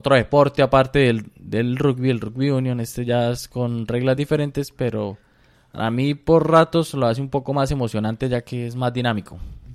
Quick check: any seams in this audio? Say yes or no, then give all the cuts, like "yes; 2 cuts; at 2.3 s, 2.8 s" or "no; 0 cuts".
no; 0 cuts